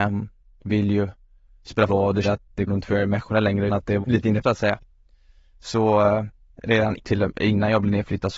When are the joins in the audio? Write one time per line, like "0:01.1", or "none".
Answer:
0:01.9
0:02.2
0:02.7
0:03.7
0:04.0
0:04.4
0:06.5
0:07.0